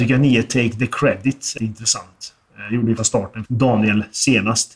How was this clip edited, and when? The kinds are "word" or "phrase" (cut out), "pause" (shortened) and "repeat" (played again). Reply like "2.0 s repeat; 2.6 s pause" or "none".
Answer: 1.6 s word; 3.0 s word; 3.5 s word